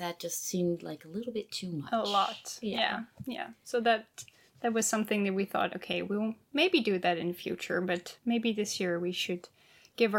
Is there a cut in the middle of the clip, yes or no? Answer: no